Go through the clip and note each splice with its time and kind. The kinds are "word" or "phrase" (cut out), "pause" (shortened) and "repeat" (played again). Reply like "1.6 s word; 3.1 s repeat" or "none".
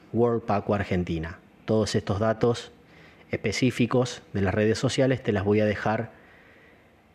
none